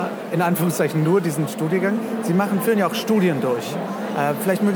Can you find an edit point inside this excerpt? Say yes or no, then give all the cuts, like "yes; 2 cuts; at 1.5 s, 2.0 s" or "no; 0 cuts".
no; 0 cuts